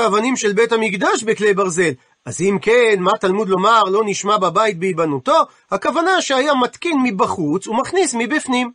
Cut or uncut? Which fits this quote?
uncut